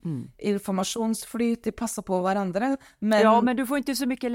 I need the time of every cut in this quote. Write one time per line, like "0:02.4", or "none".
none